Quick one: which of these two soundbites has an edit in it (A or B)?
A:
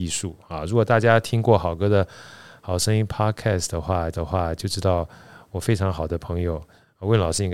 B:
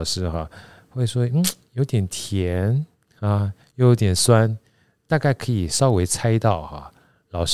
A